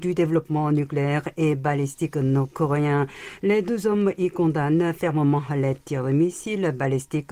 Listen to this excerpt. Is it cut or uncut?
uncut